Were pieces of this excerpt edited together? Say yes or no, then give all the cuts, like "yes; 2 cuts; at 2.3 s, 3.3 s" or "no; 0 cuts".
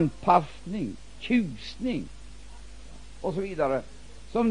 no; 0 cuts